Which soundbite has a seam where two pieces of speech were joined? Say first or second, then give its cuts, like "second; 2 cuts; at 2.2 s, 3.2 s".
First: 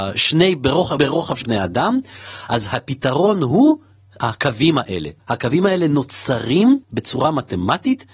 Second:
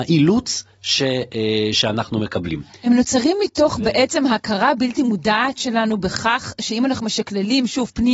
first; 4 cuts; at 1.0 s, 1.4 s, 5.2 s, 6.8 s